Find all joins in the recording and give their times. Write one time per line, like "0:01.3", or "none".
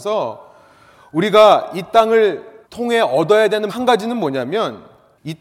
0:02.6
0:03.7